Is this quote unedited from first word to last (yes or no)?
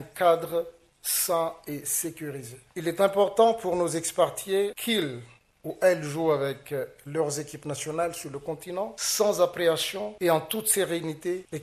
yes